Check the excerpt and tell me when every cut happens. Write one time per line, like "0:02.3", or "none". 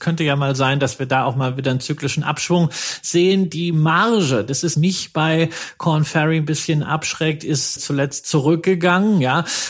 0:04.7
0:07.8